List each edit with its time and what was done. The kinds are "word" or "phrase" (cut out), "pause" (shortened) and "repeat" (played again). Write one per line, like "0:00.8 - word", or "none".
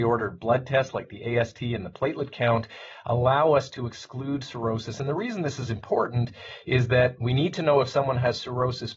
none